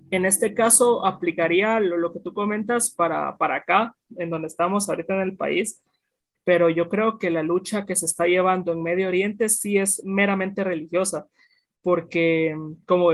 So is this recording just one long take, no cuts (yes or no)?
yes